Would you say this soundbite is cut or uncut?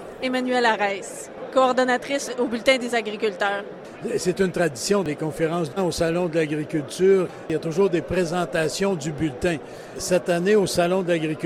cut